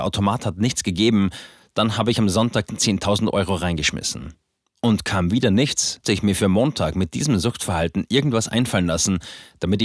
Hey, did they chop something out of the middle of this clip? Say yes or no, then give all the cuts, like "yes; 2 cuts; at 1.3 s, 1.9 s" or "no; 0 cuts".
yes; 2 cuts; at 2.7 s, 6.0 s